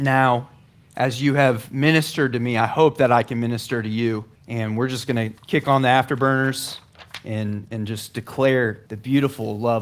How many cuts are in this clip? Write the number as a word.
three